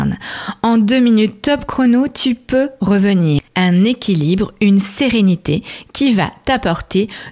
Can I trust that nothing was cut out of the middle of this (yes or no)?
no